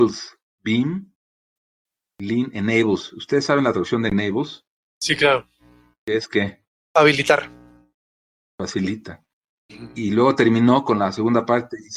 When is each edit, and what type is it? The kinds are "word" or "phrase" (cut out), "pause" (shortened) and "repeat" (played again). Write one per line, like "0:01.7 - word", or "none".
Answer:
none